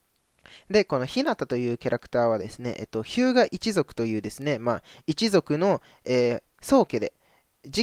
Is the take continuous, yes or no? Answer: yes